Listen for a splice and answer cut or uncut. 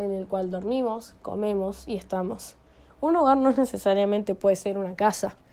uncut